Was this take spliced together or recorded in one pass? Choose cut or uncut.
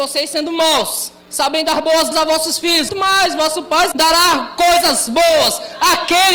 cut